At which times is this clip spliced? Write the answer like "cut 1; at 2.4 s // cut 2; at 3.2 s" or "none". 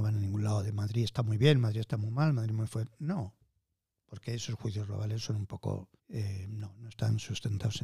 cut 1; at 6.0 s